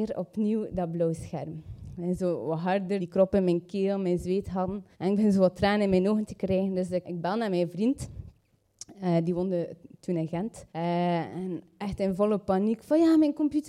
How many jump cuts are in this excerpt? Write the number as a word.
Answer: four